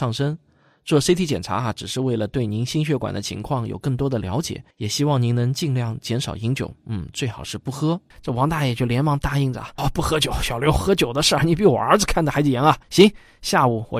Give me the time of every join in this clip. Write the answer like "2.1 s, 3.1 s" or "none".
4.7 s, 8.1 s, 9.8 s, 12.8 s